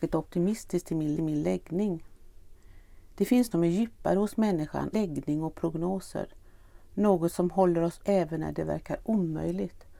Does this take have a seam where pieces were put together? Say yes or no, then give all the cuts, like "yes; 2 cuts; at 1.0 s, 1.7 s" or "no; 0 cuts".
yes; 4 cuts; at 1.2 s, 3.5 s, 4.9 s, 8.0 s